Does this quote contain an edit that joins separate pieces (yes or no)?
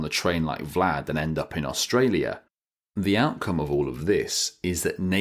no